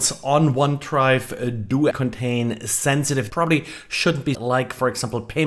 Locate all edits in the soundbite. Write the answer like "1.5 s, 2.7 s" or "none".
1.9 s, 3.3 s, 4.3 s